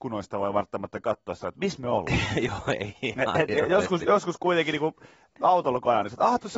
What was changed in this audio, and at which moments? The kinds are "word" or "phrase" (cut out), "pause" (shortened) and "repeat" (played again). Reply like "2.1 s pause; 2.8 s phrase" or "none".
none